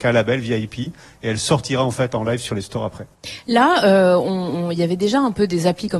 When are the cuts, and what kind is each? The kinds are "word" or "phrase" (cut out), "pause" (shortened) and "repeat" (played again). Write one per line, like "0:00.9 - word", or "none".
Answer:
none